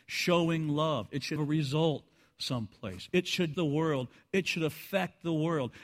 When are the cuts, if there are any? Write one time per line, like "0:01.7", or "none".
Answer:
0:01.4
0:03.5